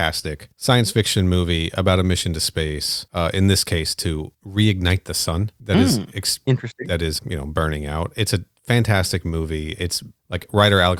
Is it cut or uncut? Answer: cut